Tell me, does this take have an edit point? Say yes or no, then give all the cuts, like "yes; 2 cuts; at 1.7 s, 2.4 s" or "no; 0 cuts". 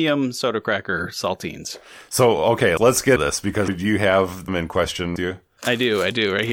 yes; 5 cuts; at 2.8 s, 3.2 s, 3.7 s, 4.5 s, 5.2 s